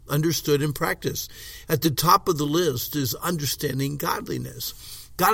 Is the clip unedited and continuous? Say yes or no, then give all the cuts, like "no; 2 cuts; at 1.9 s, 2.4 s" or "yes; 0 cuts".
yes; 0 cuts